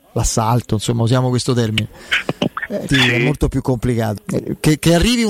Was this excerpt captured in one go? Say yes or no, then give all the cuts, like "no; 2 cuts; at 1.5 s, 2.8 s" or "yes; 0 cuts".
no; 2 cuts; at 2.9 s, 4.2 s